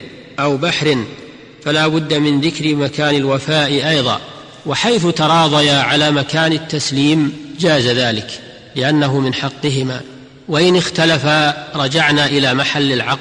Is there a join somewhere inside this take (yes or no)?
no